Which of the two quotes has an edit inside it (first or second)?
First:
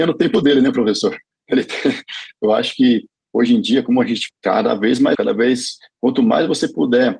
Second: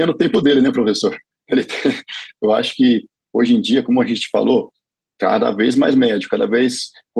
first